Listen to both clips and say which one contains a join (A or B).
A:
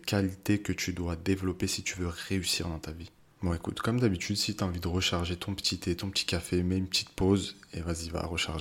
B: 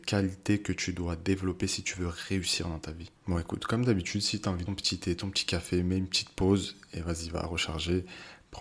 B